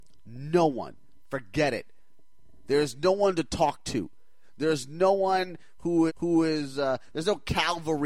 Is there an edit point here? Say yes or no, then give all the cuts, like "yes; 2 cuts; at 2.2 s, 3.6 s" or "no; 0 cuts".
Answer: yes; 1 cut; at 6.1 s